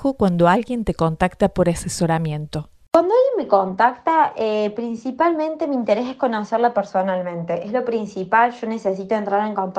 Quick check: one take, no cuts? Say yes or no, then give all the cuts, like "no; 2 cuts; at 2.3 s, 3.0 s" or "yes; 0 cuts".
yes; 0 cuts